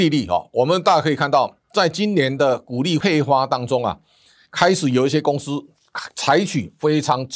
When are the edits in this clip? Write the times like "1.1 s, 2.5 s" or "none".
1.6 s